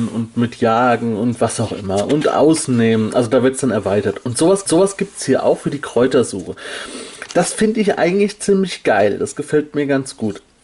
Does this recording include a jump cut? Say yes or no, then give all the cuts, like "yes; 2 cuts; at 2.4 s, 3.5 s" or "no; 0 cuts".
yes; 1 cut; at 4.7 s